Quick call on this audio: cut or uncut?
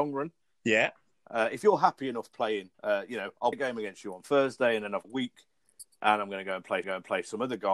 cut